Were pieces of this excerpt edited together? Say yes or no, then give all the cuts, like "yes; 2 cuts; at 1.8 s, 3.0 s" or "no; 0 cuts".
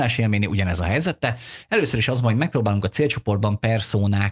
no; 0 cuts